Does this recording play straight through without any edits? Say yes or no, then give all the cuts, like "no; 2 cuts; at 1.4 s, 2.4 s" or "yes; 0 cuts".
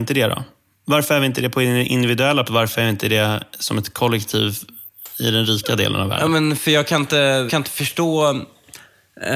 no; 2 cuts; at 2.4 s, 7.5 s